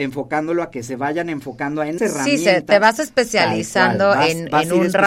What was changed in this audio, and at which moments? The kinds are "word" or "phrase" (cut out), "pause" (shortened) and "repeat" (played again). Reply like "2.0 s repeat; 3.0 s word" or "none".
2.0 s word